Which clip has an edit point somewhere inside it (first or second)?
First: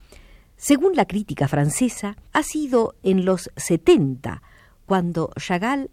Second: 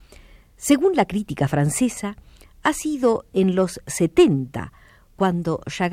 first